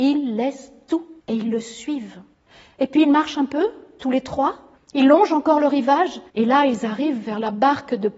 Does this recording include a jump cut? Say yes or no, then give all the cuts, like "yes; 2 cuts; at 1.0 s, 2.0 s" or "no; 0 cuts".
yes; 4 cuts; at 1.2 s, 2.3 s, 4.8 s, 6.3 s